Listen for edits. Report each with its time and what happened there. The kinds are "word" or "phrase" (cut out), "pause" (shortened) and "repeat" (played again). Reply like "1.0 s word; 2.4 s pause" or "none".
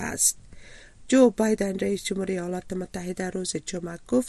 none

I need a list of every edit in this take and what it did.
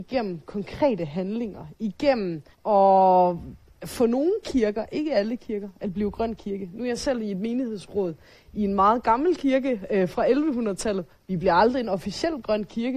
2.5 s pause

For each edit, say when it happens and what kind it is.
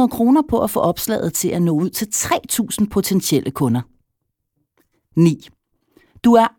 none

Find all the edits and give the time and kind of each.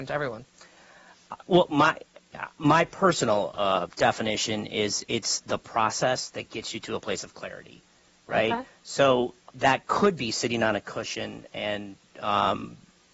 9.5 s word

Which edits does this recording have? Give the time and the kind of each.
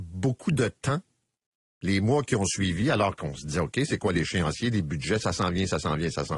none

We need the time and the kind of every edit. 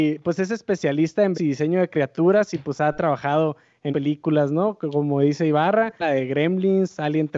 1.3 s word; 3.9 s word; 6.0 s word

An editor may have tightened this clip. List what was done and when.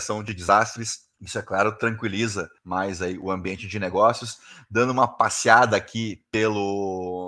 1.1 s pause; 2.6 s pause

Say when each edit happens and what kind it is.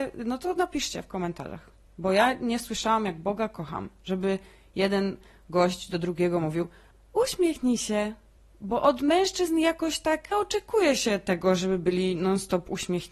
10.3 s word

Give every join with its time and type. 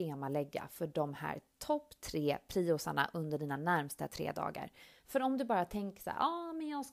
none

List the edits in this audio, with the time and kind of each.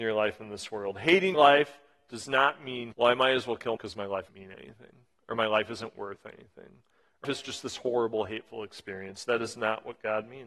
1.3 s word; 2.9 s word; 3.8 s word; 4.3 s word; 7.2 s word

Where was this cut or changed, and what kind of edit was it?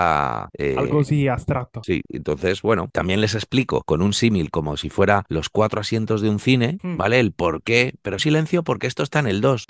8.2 s phrase

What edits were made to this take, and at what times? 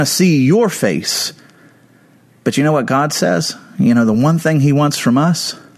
none

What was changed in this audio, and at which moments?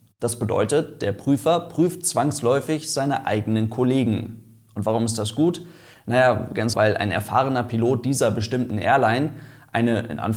6.7 s word

